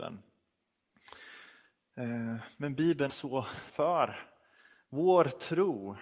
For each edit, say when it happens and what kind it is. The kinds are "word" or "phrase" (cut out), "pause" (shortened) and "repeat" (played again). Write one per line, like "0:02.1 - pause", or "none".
0:03.1 - word
0:03.7 - word